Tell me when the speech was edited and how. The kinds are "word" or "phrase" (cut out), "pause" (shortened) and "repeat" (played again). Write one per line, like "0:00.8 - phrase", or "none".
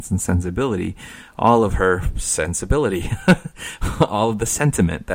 none

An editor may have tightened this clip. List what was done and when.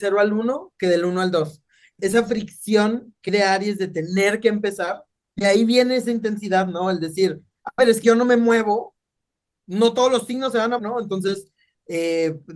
0:02.0 - word
0:03.3 - word
0:08.0 - word
0:10.8 - word

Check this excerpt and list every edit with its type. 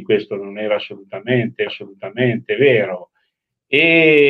0:01.7 - repeat

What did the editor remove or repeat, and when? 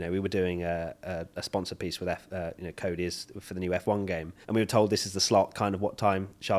0:04.4 - pause

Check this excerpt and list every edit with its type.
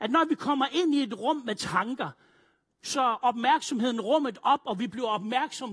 0:02.9 - word

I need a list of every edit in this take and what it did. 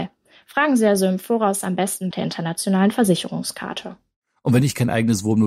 0:02.1 - phrase

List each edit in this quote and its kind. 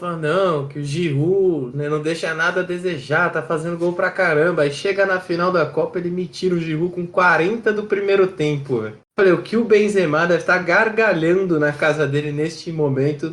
none

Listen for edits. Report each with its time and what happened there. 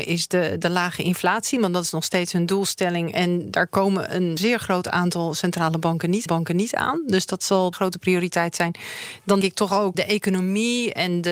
0:04.4 - word
0:06.3 - repeat
0:07.7 - phrase
0:09.4 - word
0:09.9 - word

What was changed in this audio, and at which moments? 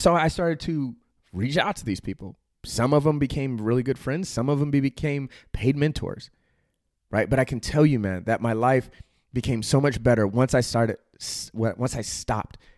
none

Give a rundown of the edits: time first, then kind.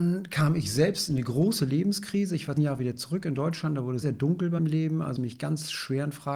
0:02.6 - word
0:04.0 - word
0:04.6 - word
0:05.2 - word

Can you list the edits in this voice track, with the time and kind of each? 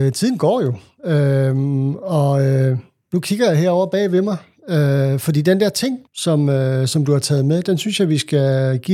0:06.1 - pause

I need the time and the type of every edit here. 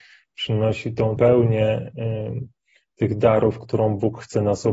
0:01.2 - word

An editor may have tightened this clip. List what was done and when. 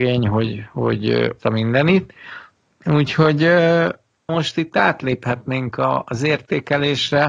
0:01.4 - word
0:04.3 - word

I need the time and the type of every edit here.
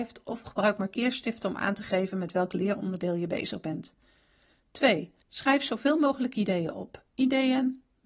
0:05.2 - pause

